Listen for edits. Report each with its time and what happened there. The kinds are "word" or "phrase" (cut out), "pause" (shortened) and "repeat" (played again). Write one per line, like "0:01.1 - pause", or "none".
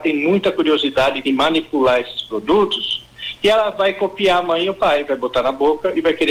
none